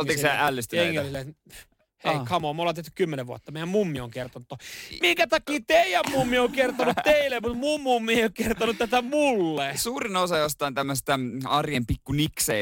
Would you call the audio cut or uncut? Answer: uncut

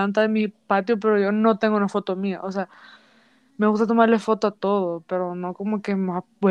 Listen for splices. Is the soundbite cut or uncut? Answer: uncut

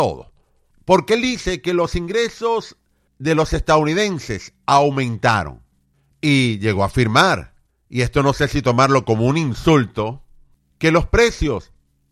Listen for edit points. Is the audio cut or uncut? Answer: uncut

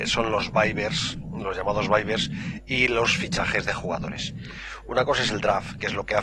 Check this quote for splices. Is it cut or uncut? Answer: uncut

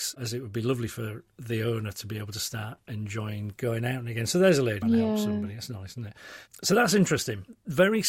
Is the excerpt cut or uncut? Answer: cut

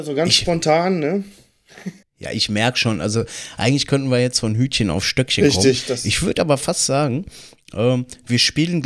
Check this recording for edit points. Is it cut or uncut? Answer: cut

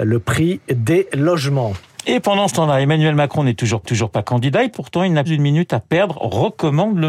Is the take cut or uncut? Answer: cut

